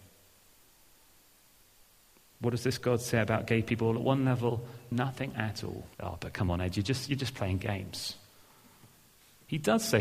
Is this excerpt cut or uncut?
cut